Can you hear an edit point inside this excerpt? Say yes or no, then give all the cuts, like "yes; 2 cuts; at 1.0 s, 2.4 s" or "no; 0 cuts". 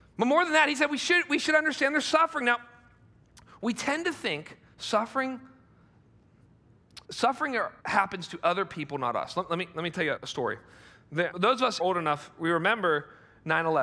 yes; 5 cuts; at 7.0 s, 7.8 s, 10.2 s, 11.3 s, 11.8 s